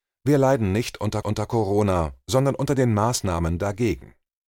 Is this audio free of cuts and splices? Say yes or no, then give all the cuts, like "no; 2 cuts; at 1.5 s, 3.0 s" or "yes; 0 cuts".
no; 1 cut; at 1.2 s